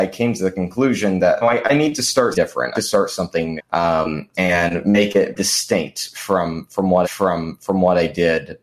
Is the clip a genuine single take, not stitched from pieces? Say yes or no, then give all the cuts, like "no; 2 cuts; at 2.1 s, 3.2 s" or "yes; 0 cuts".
no; 7 cuts; at 1.4 s, 2.3 s, 2.7 s, 3.6 s, 4.3 s, 5.4 s, 7.0 s